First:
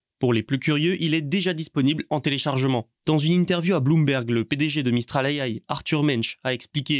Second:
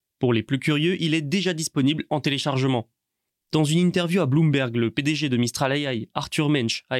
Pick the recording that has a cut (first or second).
first